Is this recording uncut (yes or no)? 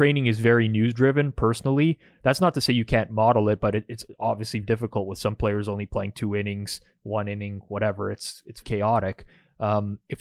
no